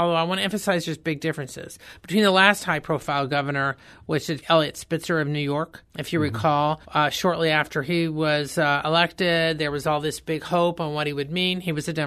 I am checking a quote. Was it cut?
yes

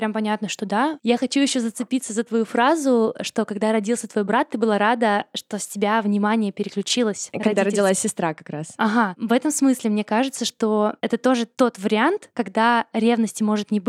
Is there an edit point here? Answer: no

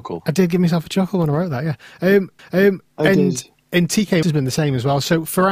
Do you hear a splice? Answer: yes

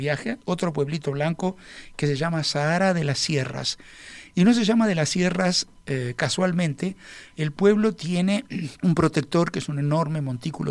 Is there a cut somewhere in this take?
yes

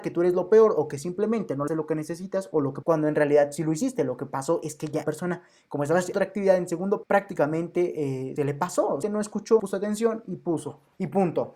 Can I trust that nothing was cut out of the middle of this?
no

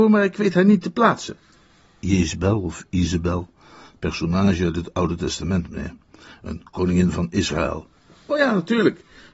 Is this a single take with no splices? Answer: yes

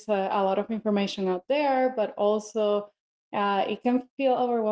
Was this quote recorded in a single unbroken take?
yes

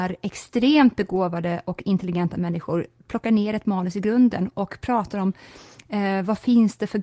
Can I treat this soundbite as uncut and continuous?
yes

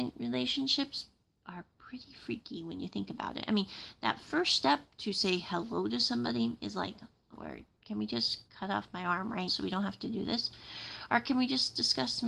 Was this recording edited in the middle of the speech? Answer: yes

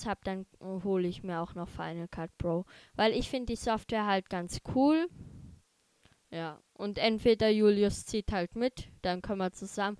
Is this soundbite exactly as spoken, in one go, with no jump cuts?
yes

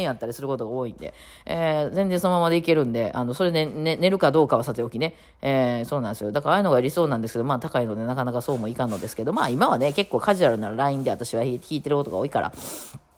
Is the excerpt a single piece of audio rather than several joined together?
yes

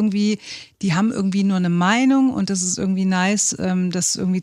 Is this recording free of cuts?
yes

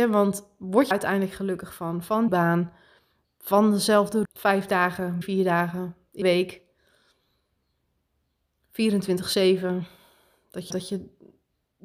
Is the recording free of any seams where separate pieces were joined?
no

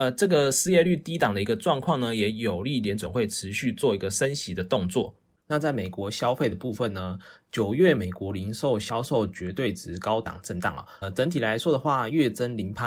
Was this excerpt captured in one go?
no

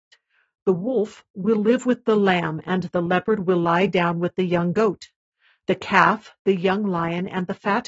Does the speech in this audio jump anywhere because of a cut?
no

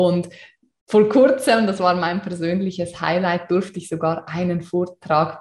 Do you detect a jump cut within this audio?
no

